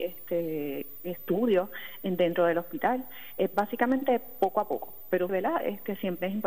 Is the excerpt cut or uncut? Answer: cut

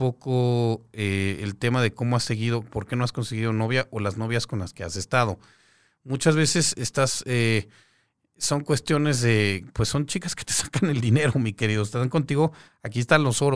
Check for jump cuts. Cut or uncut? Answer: uncut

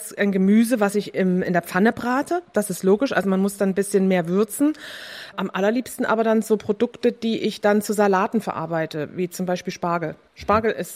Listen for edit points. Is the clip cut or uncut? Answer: uncut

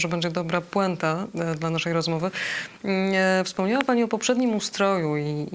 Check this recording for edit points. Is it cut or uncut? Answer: uncut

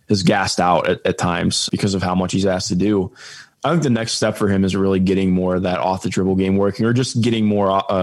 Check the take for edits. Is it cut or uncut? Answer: cut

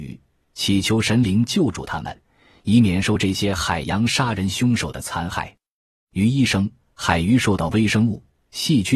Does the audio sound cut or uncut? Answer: uncut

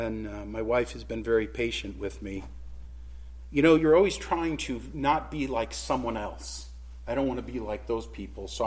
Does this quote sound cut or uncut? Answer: uncut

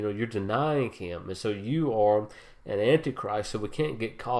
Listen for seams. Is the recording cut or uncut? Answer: uncut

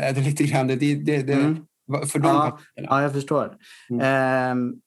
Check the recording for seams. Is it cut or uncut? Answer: uncut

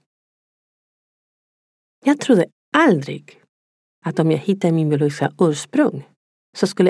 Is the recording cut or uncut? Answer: uncut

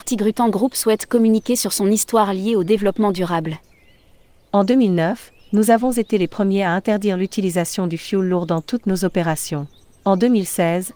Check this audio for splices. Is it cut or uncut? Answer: uncut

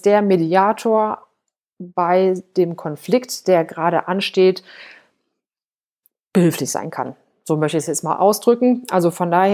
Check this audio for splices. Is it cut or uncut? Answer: uncut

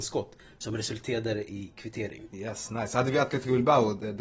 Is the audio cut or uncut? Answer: cut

